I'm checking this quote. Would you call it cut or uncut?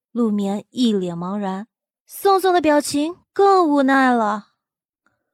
cut